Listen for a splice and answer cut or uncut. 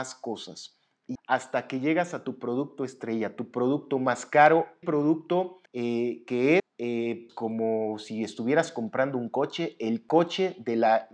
cut